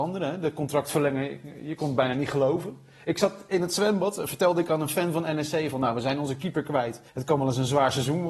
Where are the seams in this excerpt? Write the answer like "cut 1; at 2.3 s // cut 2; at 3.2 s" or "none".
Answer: cut 1; at 7.1 s